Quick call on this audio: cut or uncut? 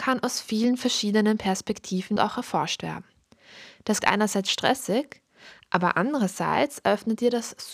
cut